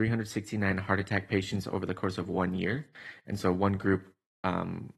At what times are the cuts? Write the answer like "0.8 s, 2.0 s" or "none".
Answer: none